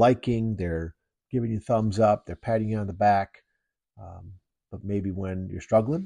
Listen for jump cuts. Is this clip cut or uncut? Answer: cut